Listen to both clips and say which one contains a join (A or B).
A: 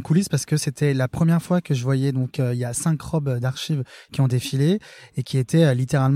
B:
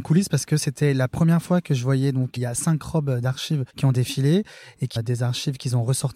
B